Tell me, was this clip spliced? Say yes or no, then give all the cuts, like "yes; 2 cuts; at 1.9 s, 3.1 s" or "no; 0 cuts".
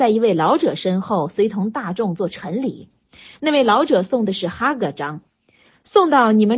no; 0 cuts